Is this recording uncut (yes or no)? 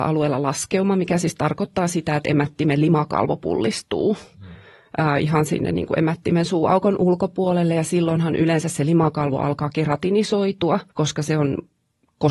no